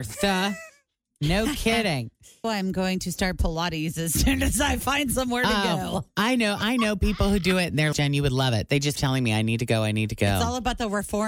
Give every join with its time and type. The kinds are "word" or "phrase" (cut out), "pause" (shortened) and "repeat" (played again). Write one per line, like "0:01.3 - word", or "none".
0:02.4 - word
0:07.9 - word
0:09.0 - word